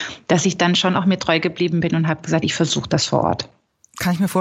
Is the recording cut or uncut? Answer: uncut